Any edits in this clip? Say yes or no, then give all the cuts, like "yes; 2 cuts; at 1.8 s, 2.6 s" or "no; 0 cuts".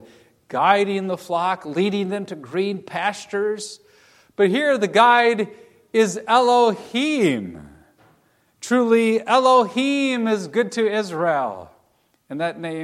no; 0 cuts